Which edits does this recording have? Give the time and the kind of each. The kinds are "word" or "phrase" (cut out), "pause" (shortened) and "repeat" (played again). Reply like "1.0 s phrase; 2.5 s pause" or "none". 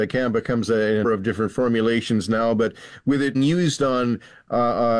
1.0 s word; 3.3 s word